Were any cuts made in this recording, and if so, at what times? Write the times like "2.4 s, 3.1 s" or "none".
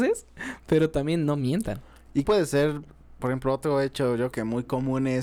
2.2 s, 3.2 s, 4.3 s